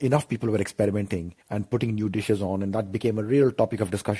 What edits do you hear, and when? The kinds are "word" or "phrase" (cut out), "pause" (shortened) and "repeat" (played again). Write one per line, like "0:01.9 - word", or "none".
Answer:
0:01.4 - pause